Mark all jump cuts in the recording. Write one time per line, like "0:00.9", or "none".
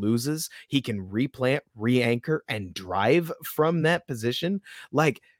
none